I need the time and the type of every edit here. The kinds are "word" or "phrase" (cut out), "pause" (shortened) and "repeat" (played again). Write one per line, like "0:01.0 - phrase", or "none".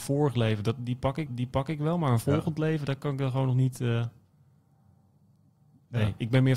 0:01.3 - repeat